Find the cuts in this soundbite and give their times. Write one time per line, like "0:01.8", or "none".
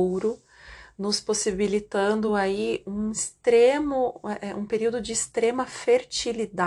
none

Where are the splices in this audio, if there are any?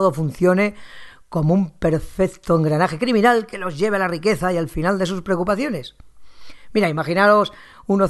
none

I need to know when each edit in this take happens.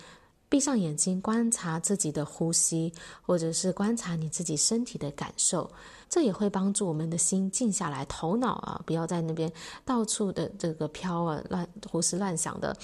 0:06.0

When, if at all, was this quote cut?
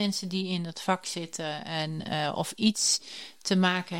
none

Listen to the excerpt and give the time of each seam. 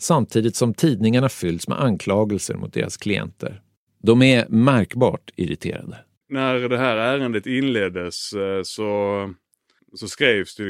0:06.2

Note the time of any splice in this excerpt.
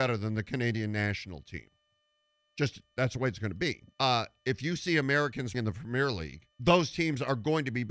0:03.9
0:05.5
0:06.5

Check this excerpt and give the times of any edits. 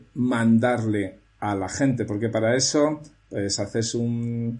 none

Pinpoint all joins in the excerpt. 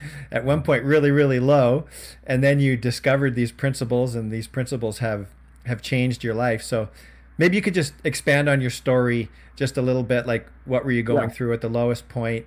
none

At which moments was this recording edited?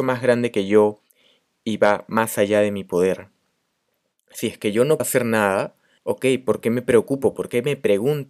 0:05.0
0:06.0

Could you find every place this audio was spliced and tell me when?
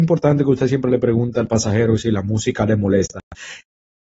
none

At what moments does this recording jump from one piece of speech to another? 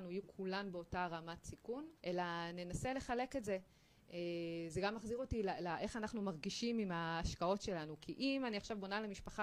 0:02.0

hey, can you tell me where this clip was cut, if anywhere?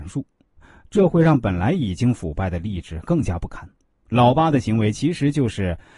0:03.8

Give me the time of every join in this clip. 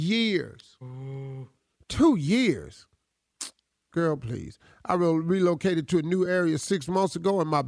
none

